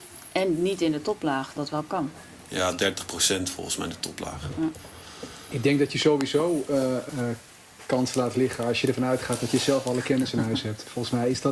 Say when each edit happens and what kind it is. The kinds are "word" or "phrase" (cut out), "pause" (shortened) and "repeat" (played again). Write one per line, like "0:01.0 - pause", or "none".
0:01.6 - word
0:07.1 - word
0:08.8 - phrase

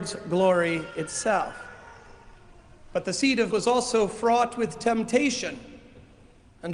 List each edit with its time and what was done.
0:03.5 - word

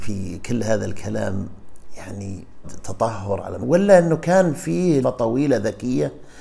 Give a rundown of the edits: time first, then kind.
0:02.6 - word
0:03.6 - word
0:05.0 - word

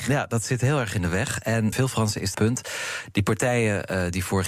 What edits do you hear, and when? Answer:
0:01.7 - phrase
0:02.3 - phrase

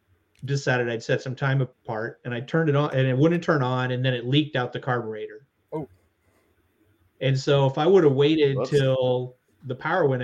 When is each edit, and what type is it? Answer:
0:01.7 - pause

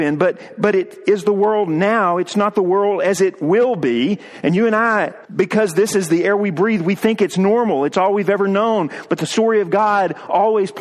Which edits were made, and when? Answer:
0:05.2 - pause

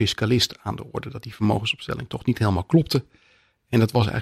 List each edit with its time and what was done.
none

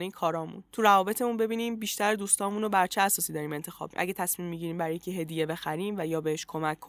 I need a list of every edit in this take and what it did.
0:03.9 - word

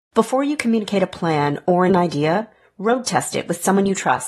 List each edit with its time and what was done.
0:01.9 - word

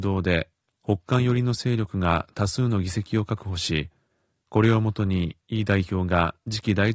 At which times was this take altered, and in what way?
none

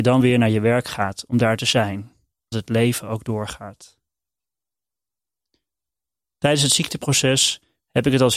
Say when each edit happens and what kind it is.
0:02.5 - word

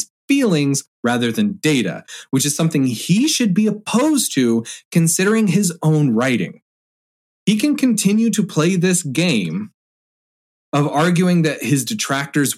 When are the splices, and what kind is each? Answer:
none

